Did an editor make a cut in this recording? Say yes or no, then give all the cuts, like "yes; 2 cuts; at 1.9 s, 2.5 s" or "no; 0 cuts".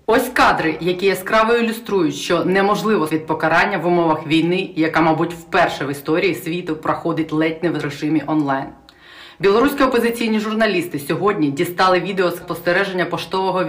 yes; 2 cuts; at 3.1 s, 12.4 s